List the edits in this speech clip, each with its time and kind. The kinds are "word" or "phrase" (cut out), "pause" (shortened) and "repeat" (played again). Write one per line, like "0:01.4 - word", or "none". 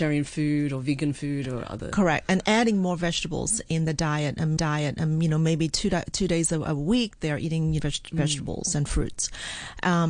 0:04.6 - repeat
0:07.8 - phrase

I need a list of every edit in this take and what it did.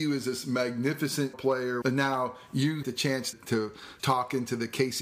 0:01.3 - word
0:01.8 - phrase
0:02.8 - word
0:03.3 - word
0:04.0 - word

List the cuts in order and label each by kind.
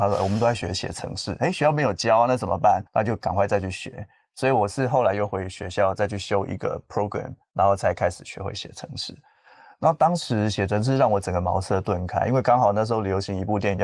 0:02.9 - pause
0:07.4 - pause

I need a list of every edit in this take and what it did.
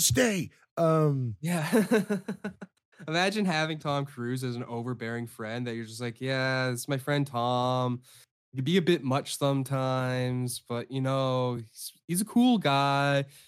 none

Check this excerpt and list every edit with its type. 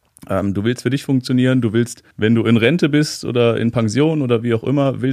0:02.1 - pause

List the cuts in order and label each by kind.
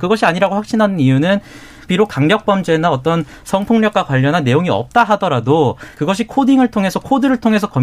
0:01.9 - word
0:05.9 - pause

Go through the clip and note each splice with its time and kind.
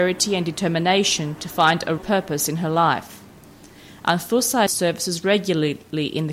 0:02.0 - word
0:04.7 - word

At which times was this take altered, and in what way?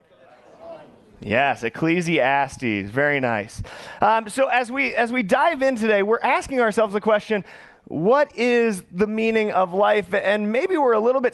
none

